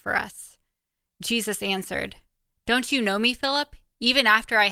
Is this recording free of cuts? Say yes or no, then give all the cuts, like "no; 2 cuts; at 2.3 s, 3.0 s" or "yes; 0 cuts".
yes; 0 cuts